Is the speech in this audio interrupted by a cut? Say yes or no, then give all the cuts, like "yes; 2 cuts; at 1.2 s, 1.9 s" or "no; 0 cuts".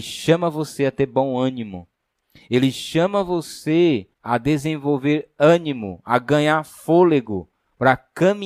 yes; 1 cut; at 4.1 s